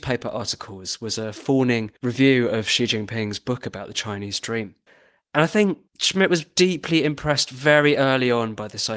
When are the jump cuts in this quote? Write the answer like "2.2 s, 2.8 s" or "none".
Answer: 2.0 s, 4.9 s, 5.9 s